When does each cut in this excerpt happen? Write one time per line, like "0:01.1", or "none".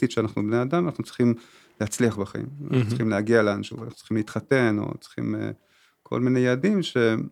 none